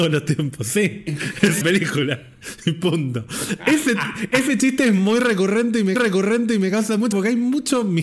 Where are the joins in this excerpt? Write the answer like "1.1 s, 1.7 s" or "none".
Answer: 1.6 s, 5.9 s, 7.1 s